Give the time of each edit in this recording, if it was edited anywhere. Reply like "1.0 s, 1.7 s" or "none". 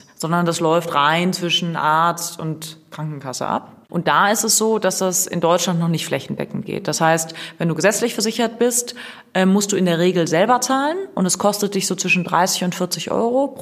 3.8 s